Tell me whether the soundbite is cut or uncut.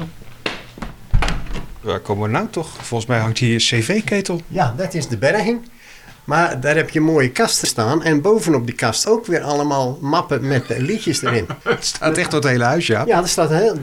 cut